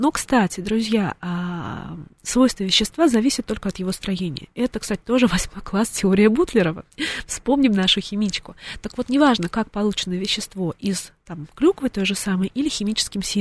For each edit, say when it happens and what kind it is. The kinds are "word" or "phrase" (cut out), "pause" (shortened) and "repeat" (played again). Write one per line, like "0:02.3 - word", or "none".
0:02.1 - pause